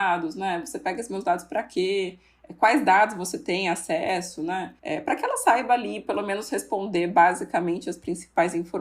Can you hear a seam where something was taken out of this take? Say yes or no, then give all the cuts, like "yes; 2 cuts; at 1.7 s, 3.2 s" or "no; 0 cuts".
yes; 1 cut; at 4.8 s